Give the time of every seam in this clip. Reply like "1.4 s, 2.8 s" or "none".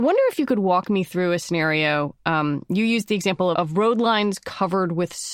3.5 s